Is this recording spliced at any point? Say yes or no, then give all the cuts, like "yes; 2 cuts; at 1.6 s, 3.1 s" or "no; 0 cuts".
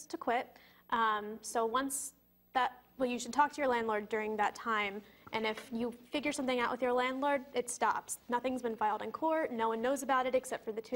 no; 0 cuts